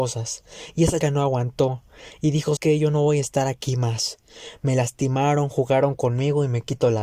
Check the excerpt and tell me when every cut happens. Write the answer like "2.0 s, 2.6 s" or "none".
1.0 s, 2.6 s